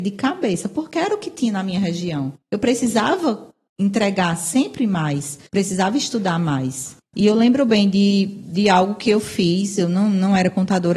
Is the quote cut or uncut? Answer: cut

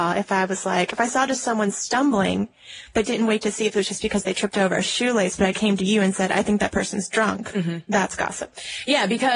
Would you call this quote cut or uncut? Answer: uncut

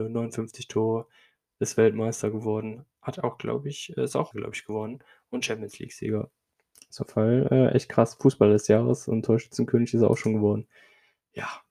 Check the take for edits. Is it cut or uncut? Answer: cut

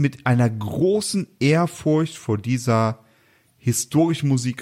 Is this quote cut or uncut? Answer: uncut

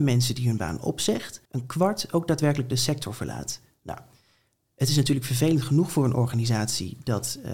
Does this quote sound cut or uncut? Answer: cut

